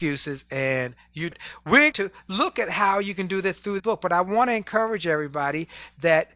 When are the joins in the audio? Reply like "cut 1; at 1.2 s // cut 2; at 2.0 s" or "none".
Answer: cut 1; at 1.3 s // cut 2; at 1.9 s // cut 3; at 3.8 s